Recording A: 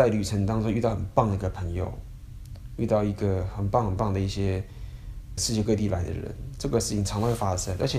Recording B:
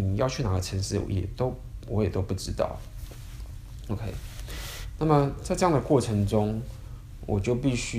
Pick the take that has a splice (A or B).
A